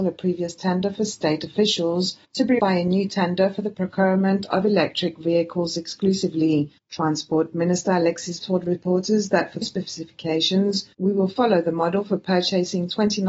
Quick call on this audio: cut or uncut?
cut